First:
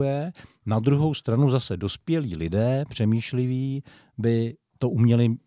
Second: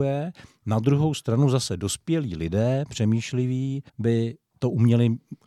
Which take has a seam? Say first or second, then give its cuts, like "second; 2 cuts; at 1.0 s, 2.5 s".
second; 1 cut; at 3.9 s